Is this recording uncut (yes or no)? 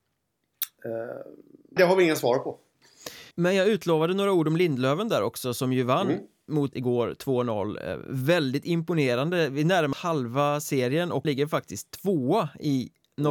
no